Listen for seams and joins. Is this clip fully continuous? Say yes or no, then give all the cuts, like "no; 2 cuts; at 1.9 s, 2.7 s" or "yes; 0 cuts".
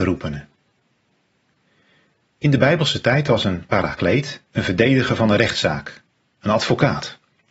no; 1 cut; at 4.4 s